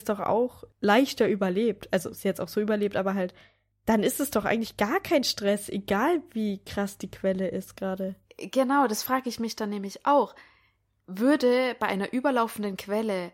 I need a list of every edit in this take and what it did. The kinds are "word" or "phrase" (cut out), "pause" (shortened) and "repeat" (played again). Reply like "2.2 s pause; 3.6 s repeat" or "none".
none